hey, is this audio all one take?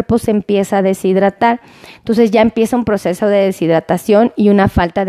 yes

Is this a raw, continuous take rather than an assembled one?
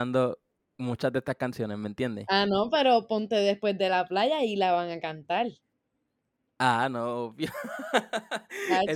yes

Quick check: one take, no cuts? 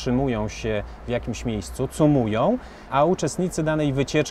yes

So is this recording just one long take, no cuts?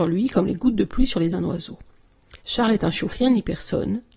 no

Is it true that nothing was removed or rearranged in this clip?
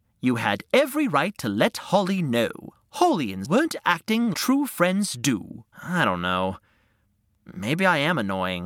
no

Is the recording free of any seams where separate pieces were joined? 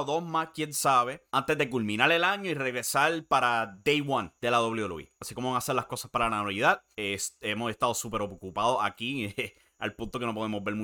no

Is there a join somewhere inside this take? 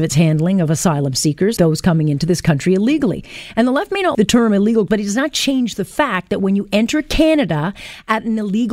yes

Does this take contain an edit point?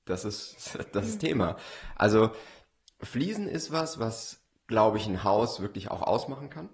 no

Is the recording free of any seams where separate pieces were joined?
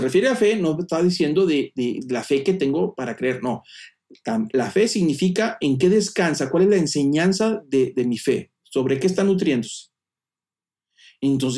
yes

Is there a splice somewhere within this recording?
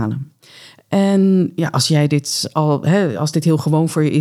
no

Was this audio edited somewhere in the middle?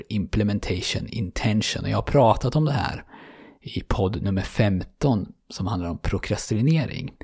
no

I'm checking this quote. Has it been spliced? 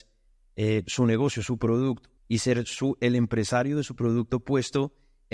yes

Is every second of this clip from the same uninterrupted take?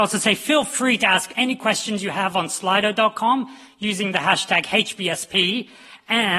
yes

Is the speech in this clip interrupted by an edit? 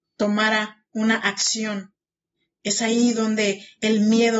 no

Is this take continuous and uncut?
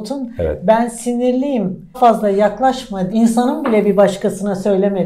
no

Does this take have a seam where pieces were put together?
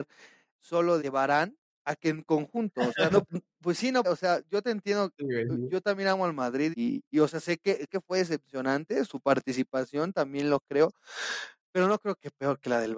yes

